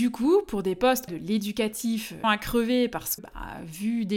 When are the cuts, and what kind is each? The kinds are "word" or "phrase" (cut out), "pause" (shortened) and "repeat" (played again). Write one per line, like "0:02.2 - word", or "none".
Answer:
0:01.1 - phrase
0:02.2 - word
0:03.2 - word